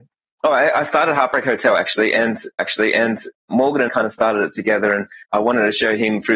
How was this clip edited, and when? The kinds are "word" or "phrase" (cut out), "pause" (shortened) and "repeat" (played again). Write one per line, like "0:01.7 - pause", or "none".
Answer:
0:02.6 - repeat
0:03.9 - word
0:05.2 - pause